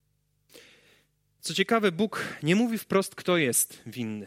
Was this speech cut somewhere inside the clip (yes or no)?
no